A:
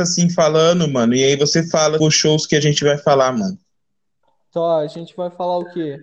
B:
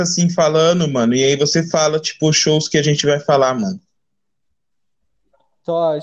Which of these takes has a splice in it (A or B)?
A